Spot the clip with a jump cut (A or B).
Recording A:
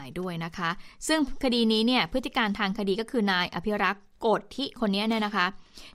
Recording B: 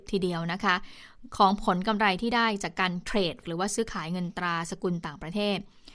B